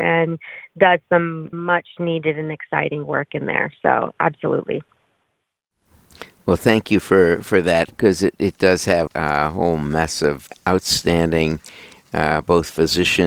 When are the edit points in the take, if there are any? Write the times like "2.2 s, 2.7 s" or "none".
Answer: 1.5 s, 9.1 s, 10.5 s